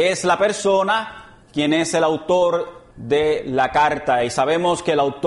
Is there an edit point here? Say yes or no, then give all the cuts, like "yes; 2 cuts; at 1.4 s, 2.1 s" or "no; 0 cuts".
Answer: yes; 2 cuts; at 1.4 s, 2.9 s